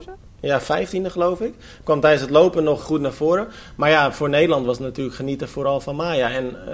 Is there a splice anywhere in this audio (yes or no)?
yes